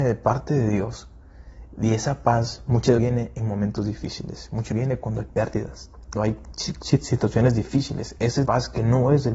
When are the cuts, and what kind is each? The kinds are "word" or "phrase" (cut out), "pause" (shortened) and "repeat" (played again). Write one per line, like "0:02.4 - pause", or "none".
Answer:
0:03.0 - word
0:04.7 - word
0:06.1 - word
0:08.4 - word